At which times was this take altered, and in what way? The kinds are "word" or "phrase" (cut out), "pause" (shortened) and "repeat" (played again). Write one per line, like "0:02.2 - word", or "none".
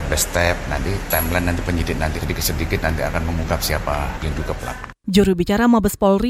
0:02.2 - word
0:04.2 - word